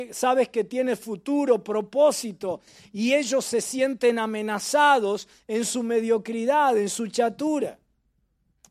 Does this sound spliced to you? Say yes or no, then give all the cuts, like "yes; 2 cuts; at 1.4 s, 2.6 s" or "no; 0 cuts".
no; 0 cuts